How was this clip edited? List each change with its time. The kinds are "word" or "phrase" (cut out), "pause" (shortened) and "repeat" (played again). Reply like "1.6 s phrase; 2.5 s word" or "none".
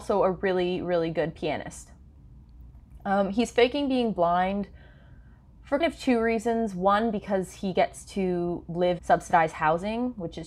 5.8 s word; 9.0 s word